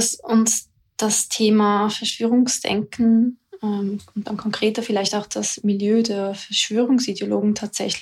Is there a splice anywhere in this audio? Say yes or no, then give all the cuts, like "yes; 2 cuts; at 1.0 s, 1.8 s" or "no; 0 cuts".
no; 0 cuts